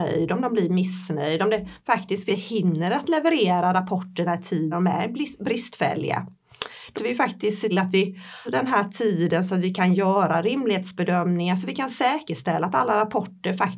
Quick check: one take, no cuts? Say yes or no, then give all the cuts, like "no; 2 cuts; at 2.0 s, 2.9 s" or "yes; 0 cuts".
no; 5 cuts; at 2.3 s, 4.7 s, 6.9 s, 7.7 s, 8.4 s